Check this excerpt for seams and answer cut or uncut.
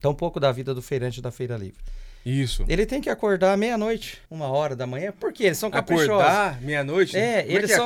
cut